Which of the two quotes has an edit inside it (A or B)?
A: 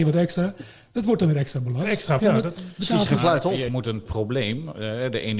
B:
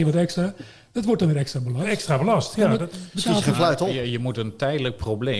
A